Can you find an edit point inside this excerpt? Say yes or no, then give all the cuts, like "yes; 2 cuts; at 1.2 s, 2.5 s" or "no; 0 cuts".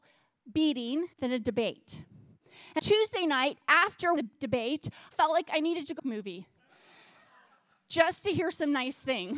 yes; 5 cuts; at 1.1 s, 2.8 s, 4.2 s, 5.1 s, 6.0 s